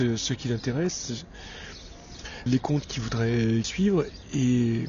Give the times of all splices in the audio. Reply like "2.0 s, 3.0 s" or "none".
2.5 s, 3.6 s